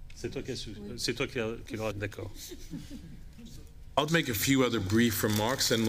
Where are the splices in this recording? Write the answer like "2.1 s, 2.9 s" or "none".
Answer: 1.9 s, 4.1 s